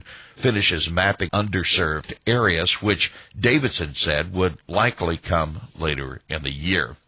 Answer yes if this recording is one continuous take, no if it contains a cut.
no